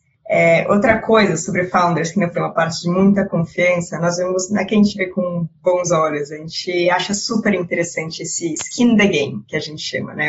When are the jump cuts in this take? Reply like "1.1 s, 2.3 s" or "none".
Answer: 2.3 s